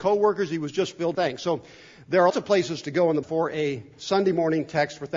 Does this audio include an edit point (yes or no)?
yes